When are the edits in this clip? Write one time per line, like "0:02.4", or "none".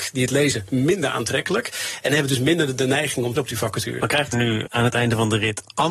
0:03.4
0:04.3
0:04.7